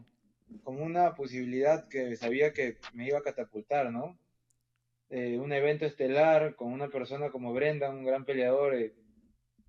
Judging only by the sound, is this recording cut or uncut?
uncut